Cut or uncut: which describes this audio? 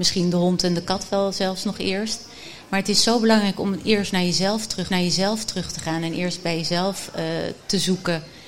cut